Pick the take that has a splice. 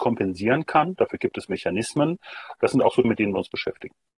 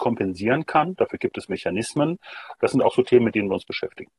first; 1 cut; at 3.0 s

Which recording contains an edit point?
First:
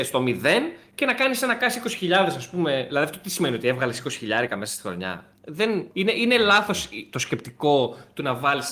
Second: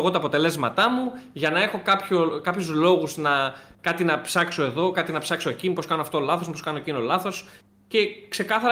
first; 1 cut; at 5.9 s

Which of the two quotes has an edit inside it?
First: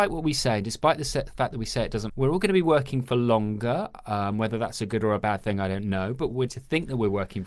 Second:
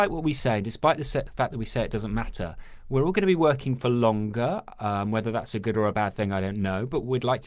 first; 2 cuts; at 2.1 s, 6.5 s

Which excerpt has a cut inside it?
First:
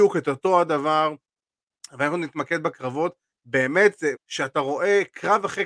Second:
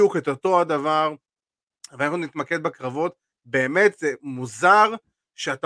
first; 1 cut; at 4.2 s

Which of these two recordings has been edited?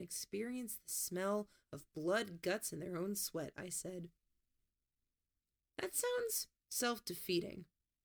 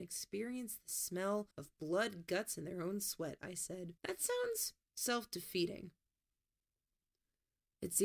second; 2 cuts; at 1.5 s, 4.0 s

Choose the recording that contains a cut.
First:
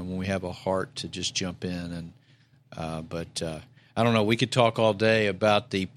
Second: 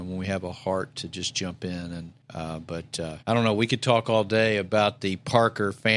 second; 2 cuts; at 2.2 s, 3.2 s

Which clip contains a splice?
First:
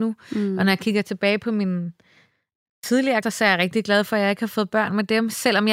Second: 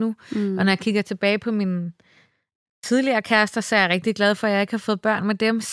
first; 1 cut; at 3.2 s

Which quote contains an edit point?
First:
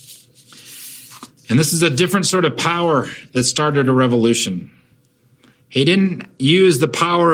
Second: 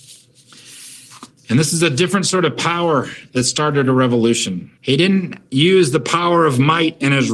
second; 1 cut; at 4.8 s

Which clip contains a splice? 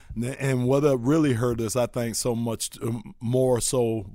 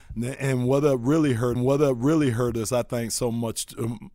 second; 1 cut; at 1.6 s

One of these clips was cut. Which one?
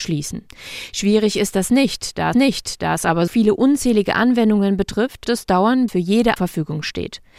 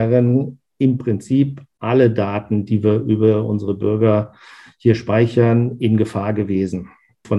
first; 5 cuts; at 2.3 s, 3.3 s, 5.2 s, 5.9 s, 6.4 s

